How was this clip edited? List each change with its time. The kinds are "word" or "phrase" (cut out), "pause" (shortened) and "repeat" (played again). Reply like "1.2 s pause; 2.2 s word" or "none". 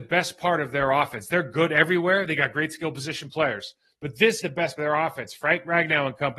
3.9 s pause; 4.4 s word; 4.8 s word